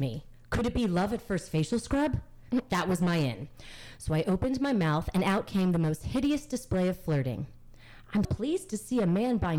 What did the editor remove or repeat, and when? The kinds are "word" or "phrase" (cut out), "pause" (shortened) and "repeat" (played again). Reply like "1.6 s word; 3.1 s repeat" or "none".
8.2 s word